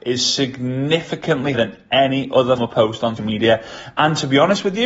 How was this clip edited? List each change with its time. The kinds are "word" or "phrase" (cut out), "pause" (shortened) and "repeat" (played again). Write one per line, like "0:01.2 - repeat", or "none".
0:01.5 - word
0:02.6 - word
0:03.2 - word